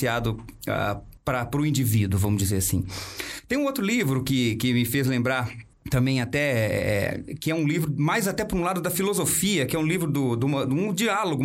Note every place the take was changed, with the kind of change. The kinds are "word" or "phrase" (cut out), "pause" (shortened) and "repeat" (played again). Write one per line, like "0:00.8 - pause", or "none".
0:01.2 - pause
0:05.7 - pause